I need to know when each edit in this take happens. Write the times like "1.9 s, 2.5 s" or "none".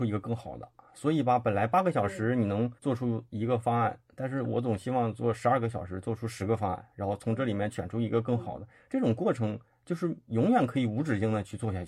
2.8 s